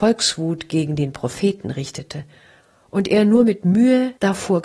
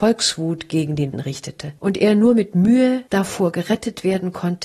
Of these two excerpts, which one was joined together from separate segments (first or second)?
second